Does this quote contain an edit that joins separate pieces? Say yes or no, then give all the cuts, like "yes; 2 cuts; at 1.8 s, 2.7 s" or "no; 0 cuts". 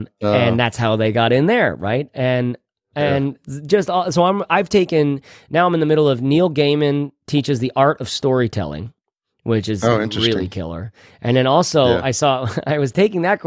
no; 0 cuts